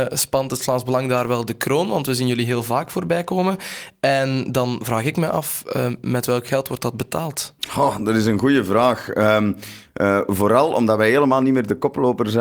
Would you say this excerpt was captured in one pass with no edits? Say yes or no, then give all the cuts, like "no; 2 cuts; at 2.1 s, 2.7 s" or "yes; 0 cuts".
no; 1 cut; at 7.6 s